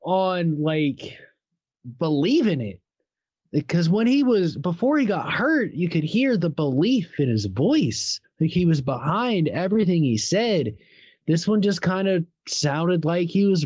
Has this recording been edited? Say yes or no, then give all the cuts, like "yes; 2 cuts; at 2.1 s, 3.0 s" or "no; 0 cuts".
yes; 1 cut; at 8.2 s